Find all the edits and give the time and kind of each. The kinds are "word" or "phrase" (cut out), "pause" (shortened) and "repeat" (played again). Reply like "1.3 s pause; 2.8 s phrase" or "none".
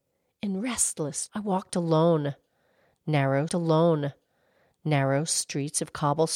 1.3 s word; 3.5 s repeat